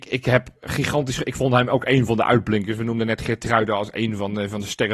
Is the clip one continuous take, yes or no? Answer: yes